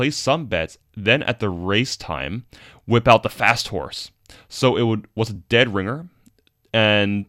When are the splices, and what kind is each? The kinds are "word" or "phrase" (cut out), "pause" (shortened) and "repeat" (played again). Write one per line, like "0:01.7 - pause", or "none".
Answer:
none